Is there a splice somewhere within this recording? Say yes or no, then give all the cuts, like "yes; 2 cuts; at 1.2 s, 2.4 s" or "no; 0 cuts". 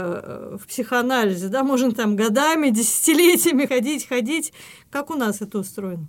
yes; 1 cut; at 3.7 s